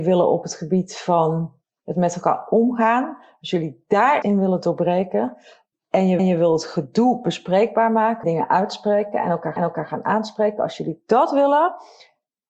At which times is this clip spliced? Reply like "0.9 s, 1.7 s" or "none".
1.6 s, 4.2 s, 5.7 s, 6.2 s, 8.2 s, 9.6 s